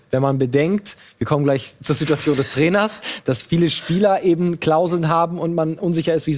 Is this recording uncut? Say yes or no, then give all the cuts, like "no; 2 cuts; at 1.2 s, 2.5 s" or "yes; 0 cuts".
yes; 0 cuts